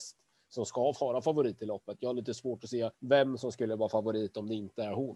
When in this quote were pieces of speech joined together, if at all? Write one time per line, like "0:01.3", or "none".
0:02.9